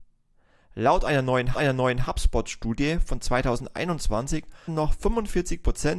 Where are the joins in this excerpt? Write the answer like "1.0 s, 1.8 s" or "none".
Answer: 1.5 s, 4.7 s